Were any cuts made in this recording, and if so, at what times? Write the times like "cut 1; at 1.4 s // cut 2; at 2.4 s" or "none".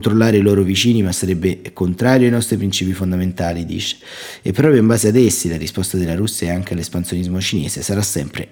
none